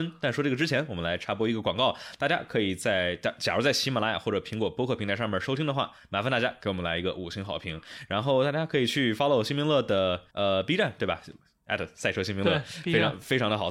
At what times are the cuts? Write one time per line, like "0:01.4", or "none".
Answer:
0:10.3